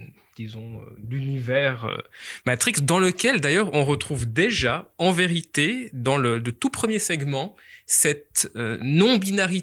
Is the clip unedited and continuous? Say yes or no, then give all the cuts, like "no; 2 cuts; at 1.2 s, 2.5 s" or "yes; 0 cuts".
yes; 0 cuts